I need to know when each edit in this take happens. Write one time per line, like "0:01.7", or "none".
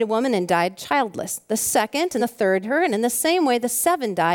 0:02.2
0:02.6

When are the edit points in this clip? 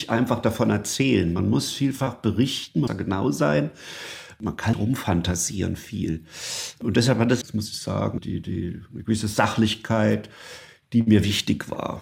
0:02.9
0:04.7
0:07.4
0:08.2

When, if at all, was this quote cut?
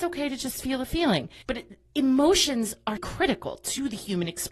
0:03.0

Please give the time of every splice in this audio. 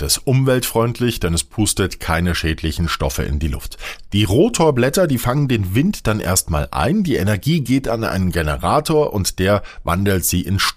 none

